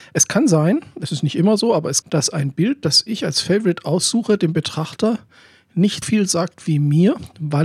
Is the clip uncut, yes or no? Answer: no